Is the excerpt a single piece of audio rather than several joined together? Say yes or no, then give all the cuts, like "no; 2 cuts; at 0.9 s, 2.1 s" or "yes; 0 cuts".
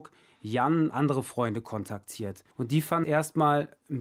no; 3 cuts; at 0.9 s, 2.5 s, 3.0 s